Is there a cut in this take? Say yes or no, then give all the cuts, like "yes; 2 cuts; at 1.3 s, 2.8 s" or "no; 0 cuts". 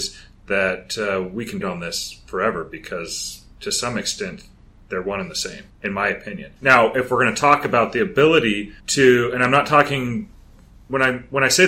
yes; 4 cuts; at 1.6 s, 5.7 s, 6.6 s, 8.8 s